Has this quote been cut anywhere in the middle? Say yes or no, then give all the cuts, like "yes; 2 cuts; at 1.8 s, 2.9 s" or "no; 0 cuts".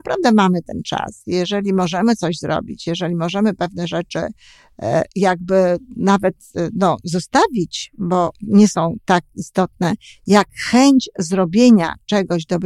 no; 0 cuts